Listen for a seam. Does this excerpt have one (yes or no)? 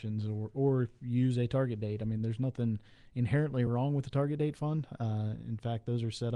no